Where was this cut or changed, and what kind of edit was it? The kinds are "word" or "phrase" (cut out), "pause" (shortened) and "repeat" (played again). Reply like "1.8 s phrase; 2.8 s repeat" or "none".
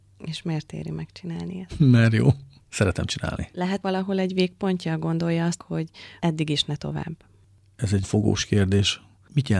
3.8 s word; 5.6 s word; 8.0 s word